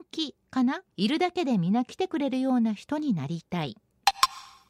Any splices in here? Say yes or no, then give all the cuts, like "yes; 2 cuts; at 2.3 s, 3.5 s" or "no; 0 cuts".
yes; 1 cut; at 0.9 s